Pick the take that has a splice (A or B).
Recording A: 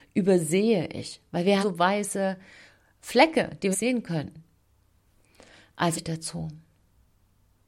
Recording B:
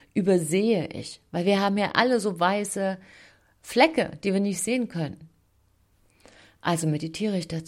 A